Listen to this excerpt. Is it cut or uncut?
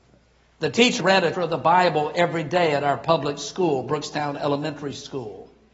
cut